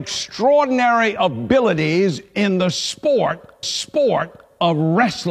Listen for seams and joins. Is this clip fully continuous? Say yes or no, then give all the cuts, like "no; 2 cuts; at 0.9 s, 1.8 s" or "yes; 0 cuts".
no; 1 cut; at 3.6 s